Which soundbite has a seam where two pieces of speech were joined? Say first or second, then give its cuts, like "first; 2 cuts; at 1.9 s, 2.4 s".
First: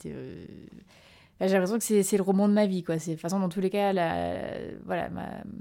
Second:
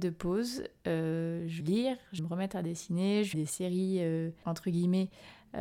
second; 4 cuts; at 1.6 s, 2.2 s, 3.3 s, 4.4 s